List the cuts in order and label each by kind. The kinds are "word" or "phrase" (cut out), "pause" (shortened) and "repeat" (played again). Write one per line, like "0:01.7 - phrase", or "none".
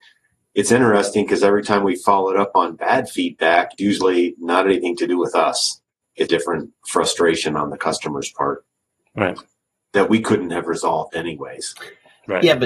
0:03.8 - word
0:06.3 - word